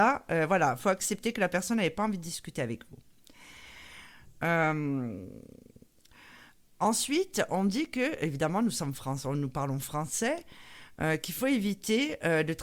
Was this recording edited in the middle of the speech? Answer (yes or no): no